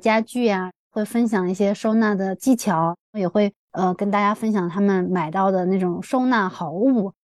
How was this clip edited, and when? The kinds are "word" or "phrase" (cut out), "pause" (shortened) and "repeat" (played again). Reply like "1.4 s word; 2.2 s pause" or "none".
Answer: 3.0 s pause

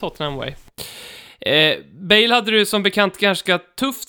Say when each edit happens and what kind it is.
none

